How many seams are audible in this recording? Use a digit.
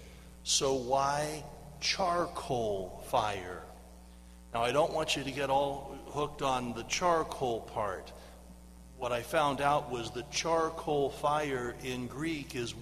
0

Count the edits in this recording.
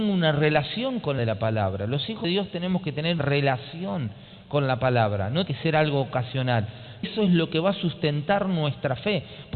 5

